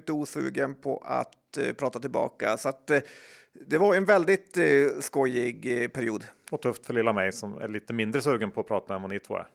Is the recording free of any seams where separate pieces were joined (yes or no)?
yes